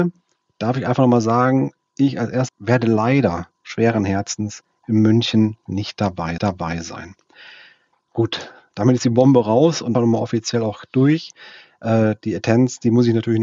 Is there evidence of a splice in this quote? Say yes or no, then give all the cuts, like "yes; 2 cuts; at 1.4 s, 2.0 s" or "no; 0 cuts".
yes; 3 cuts; at 2.5 s, 6.4 s, 9.9 s